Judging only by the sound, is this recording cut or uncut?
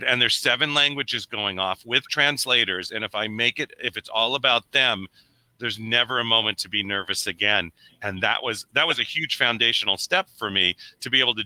uncut